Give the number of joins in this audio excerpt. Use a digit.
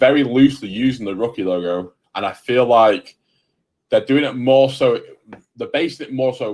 0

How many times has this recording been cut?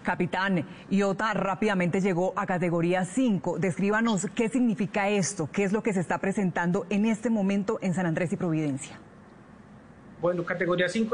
0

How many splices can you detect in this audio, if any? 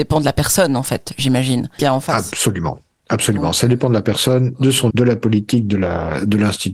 2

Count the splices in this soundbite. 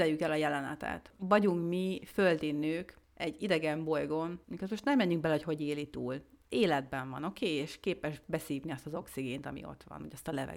2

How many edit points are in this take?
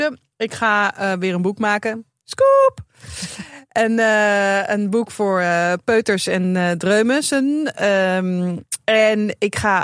0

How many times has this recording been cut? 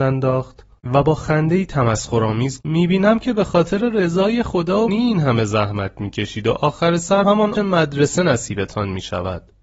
4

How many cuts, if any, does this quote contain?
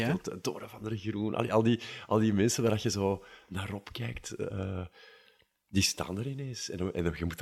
0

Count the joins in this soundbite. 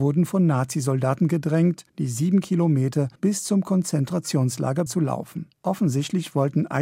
4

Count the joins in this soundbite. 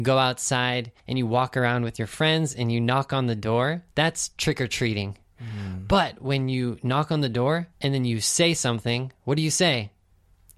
3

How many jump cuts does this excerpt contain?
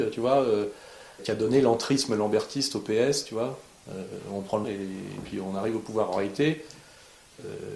2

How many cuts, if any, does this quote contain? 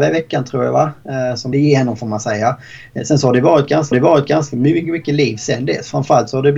2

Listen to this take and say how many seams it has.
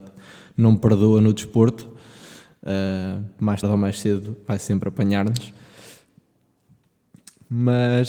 1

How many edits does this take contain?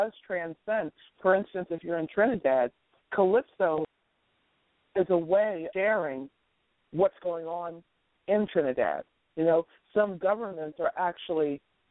1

